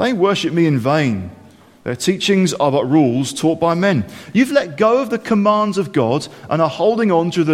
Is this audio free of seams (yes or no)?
yes